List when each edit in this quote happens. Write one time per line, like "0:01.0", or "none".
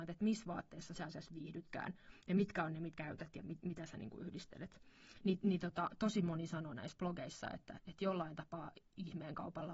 0:01.0
0:02.9
0:07.8